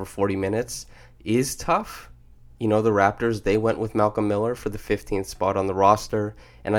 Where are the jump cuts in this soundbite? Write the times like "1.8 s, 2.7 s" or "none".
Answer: none